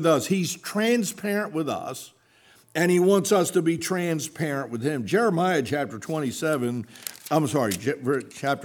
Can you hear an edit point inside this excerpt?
no; 0 cuts

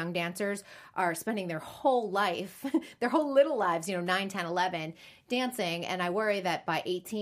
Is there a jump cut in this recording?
no; 0 cuts

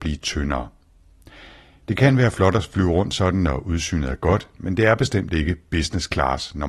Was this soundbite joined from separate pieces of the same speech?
no; 0 cuts

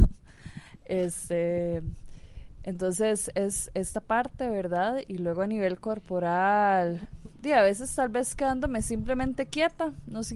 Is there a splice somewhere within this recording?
no; 0 cuts

